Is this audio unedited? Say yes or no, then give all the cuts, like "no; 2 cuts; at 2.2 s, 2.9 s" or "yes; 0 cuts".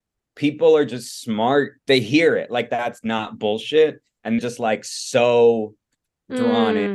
no; 3 cuts; at 1.8 s, 2.7 s, 4.4 s